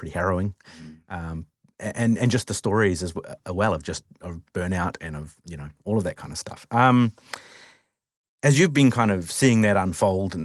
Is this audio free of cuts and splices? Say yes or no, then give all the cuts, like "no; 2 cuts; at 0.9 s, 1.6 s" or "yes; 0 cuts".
yes; 0 cuts